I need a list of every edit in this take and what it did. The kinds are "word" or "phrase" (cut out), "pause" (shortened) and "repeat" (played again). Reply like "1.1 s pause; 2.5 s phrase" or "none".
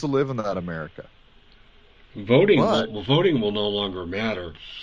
none